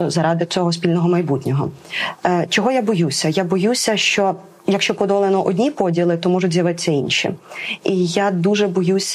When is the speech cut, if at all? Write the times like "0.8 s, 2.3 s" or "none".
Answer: none

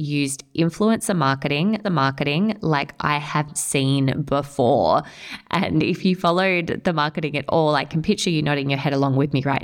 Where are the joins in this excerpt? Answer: 1.8 s, 3.5 s

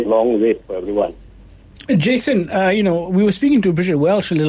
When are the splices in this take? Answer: none

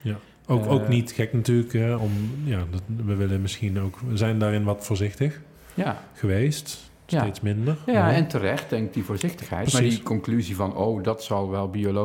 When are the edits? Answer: 2.0 s

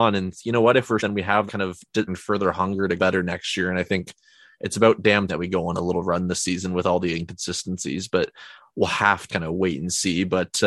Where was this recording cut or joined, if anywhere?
1.0 s, 1.5 s, 2.1 s, 3.0 s, 5.3 s, 9.3 s

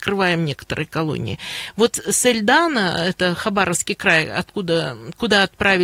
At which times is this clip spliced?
none

